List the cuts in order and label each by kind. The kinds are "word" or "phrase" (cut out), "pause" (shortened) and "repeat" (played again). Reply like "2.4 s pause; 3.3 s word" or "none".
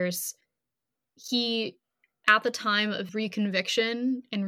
3.1 s word